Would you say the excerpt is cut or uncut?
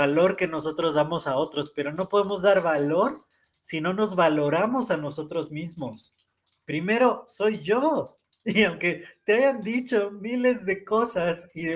uncut